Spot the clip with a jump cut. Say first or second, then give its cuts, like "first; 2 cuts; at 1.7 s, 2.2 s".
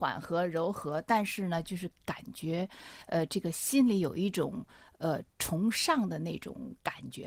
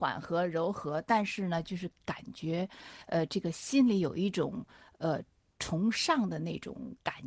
first; 1 cut; at 5.3 s